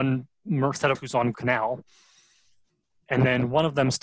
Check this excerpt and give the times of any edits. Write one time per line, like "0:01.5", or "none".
0:00.9
0:01.3